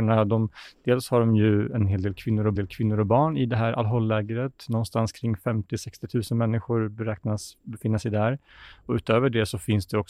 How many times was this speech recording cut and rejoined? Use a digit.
1